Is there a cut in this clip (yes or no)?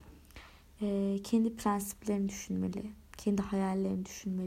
no